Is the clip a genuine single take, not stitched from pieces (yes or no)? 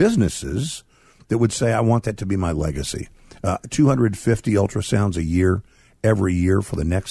yes